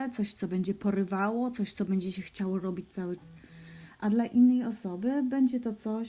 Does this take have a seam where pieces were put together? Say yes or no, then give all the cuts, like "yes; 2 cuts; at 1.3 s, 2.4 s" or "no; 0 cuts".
yes; 1 cut; at 3.2 s